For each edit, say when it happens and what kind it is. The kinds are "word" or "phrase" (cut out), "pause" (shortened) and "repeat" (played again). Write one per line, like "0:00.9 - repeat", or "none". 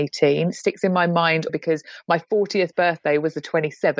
0:01.5 - word